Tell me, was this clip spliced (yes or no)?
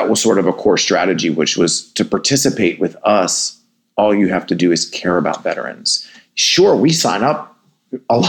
no